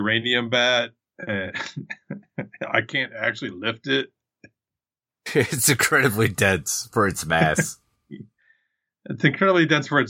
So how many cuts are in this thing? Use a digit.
1